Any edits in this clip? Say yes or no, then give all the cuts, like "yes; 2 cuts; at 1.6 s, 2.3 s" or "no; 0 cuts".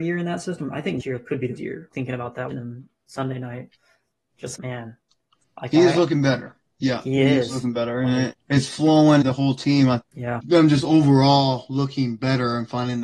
yes; 9 cuts; at 1.0 s, 1.6 s, 1.9 s, 2.5 s, 4.5 s, 8.3 s, 9.2 s, 10.0 s, 10.4 s